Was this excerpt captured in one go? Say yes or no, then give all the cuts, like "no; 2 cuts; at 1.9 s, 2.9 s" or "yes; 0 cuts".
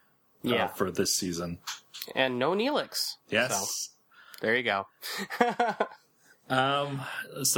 yes; 0 cuts